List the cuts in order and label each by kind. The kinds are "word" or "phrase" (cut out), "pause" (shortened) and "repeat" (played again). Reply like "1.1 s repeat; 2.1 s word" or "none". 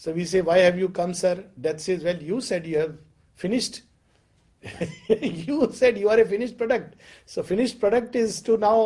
none